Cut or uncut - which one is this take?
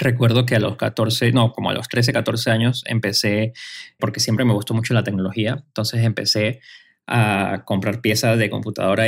cut